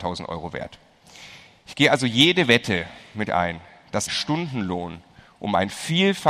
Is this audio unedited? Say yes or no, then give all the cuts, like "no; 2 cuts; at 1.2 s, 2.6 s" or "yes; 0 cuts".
no; 2 cuts; at 3.3 s, 4.1 s